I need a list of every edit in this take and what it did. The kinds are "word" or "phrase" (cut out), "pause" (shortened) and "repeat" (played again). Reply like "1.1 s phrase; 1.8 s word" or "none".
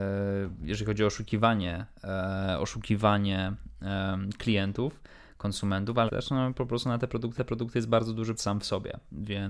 6.1 s word; 7.4 s repeat; 8.4 s word

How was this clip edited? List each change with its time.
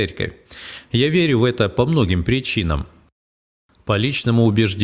none

